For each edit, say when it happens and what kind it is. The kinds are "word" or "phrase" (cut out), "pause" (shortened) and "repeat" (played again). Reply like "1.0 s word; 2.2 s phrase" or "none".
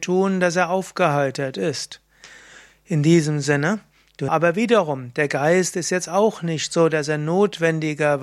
4.3 s phrase